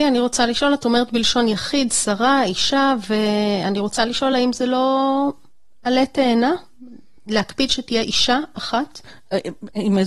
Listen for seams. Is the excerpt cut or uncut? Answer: uncut